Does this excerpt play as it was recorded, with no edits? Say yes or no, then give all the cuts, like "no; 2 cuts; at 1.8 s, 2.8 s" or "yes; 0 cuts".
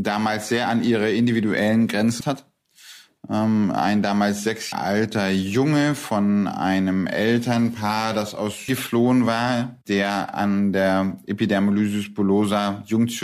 no; 3 cuts; at 2.2 s, 4.7 s, 8.7 s